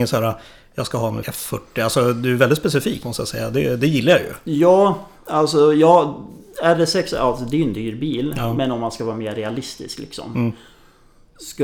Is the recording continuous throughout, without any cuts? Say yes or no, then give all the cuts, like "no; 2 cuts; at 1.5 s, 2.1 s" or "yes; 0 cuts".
no; 2 cuts; at 1.2 s, 3.0 s